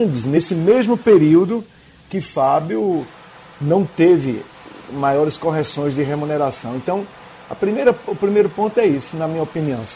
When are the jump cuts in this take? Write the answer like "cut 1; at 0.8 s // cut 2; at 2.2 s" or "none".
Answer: none